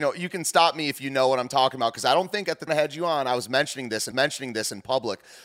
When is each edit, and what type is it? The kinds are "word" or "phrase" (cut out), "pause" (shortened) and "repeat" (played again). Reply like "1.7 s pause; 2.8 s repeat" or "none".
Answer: 2.7 s phrase; 4.1 s repeat